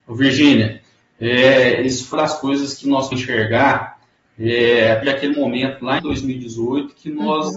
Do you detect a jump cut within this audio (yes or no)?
yes